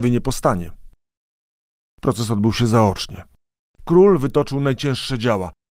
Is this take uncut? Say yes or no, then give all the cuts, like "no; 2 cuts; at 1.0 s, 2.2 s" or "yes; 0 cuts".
yes; 0 cuts